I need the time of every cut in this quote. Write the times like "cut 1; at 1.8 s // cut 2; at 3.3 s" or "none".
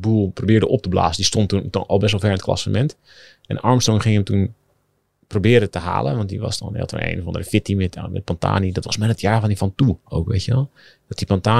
cut 1; at 8.8 s